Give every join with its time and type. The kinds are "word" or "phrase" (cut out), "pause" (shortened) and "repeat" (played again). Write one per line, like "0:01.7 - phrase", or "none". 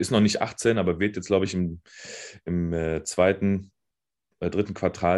none